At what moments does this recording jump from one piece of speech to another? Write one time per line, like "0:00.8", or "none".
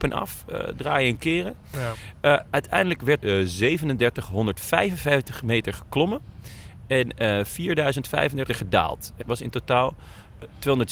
0:03.2
0:08.5
0:09.2